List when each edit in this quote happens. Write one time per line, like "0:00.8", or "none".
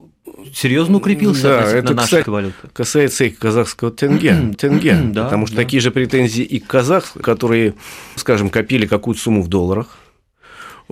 0:02.2
0:04.5
0:07.2
0:08.2